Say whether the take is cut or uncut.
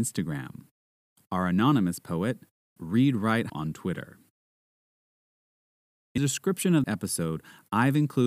cut